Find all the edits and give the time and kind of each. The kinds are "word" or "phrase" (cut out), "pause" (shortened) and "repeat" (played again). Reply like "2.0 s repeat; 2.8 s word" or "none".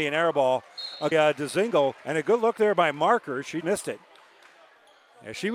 1.1 s phrase; 2.0 s pause; 3.6 s word